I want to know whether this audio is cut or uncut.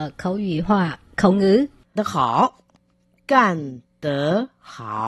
cut